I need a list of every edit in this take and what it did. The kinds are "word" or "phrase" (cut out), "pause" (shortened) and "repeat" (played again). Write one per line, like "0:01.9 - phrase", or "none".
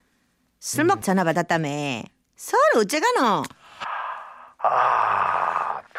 0:01.0 - word